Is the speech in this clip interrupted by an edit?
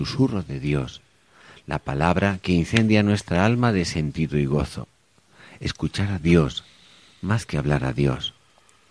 no; 0 cuts

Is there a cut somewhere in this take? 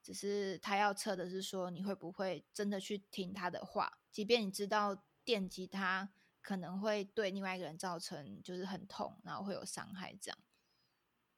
yes; 1 cut; at 4.1 s

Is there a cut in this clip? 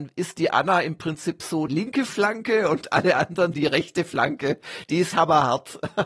yes; 3 cuts; at 1.7 s, 3.5 s, 5.1 s

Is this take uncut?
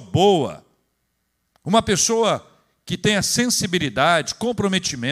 yes; 0 cuts

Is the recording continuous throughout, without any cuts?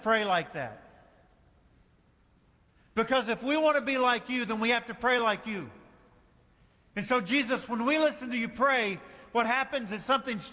yes; 0 cuts

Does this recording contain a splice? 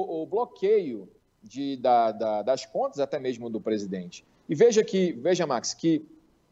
no; 0 cuts

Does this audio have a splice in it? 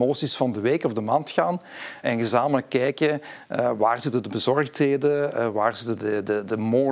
yes; 1 cut; at 2.0 s

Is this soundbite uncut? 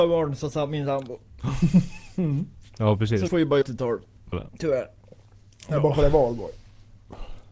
no; 3 cuts; at 3.3 s, 3.6 s, 4.3 s

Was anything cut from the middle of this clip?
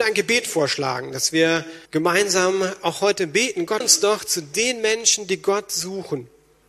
yes; 2 cuts; at 1.8 s, 3.8 s

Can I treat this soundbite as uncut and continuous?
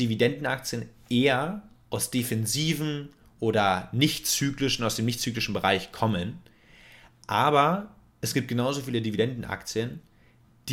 yes; 0 cuts

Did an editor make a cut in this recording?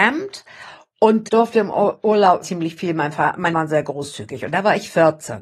yes; 3 cuts; at 1.3 s, 2.4 s, 3.5 s

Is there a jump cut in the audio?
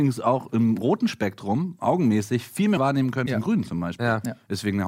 yes; 2 cuts; at 2.8 s, 3.3 s

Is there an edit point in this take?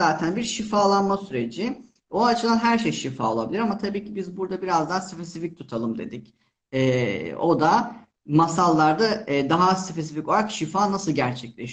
no; 0 cuts

